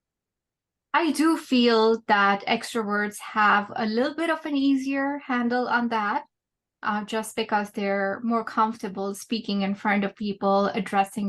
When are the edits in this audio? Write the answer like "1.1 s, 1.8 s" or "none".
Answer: none